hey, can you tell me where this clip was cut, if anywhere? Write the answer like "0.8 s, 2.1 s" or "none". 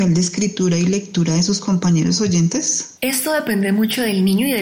none